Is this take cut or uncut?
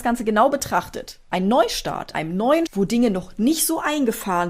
cut